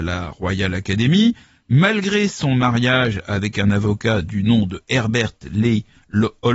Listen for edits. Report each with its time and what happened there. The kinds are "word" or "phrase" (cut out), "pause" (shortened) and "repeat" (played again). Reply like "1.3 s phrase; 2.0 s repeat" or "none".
none